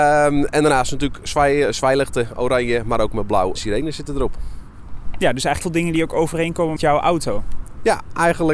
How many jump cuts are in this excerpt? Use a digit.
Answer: 3